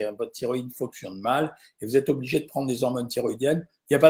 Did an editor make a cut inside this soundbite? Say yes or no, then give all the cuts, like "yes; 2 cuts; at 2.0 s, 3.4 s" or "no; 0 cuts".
no; 0 cuts